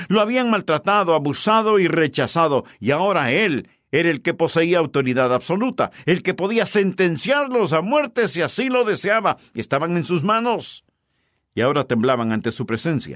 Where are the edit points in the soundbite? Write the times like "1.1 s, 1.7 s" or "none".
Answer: none